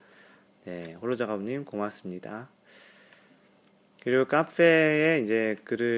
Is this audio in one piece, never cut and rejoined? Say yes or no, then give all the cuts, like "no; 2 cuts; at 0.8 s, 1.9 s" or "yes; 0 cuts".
yes; 0 cuts